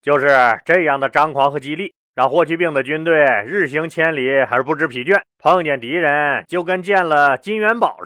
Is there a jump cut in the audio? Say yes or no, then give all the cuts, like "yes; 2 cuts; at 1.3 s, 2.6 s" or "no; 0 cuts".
yes; 2 cuts; at 2.0 s, 5.3 s